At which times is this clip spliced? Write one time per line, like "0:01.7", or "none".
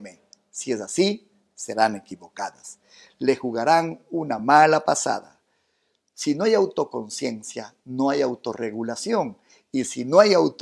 none